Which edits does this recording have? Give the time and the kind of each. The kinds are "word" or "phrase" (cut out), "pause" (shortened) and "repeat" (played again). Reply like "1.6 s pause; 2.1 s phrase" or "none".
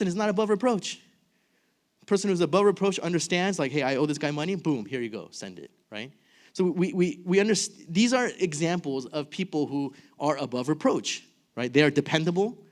none